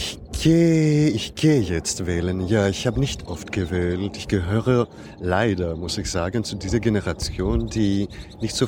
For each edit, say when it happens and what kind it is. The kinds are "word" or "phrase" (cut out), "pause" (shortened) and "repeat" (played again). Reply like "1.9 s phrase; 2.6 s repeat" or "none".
3.3 s word